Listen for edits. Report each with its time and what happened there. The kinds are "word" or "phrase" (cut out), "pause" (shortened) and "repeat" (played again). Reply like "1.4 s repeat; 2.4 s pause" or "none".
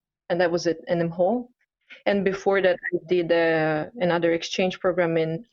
none